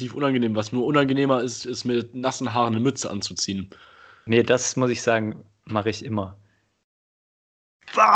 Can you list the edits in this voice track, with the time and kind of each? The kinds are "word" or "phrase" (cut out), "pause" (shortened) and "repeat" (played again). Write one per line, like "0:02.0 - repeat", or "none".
none